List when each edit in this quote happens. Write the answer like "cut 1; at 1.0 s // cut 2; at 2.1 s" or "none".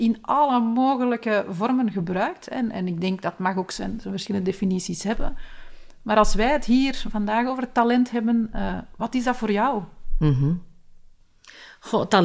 none